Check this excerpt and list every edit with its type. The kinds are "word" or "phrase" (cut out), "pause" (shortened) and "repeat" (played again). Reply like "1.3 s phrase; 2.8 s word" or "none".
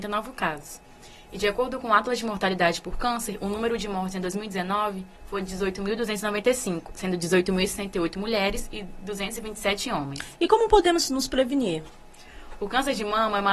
5.2 s pause